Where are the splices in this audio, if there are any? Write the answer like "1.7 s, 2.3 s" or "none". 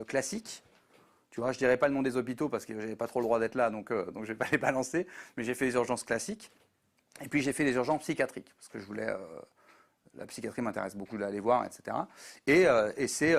11.1 s